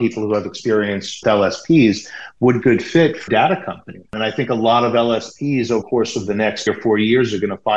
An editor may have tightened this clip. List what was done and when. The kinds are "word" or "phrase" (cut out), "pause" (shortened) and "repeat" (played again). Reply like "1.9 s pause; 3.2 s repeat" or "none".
1.2 s word; 2.6 s phrase; 3.3 s word; 4.1 s pause; 5.8 s word; 6.7 s word